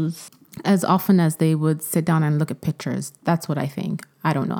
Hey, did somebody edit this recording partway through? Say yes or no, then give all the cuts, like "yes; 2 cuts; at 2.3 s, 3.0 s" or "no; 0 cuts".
no; 0 cuts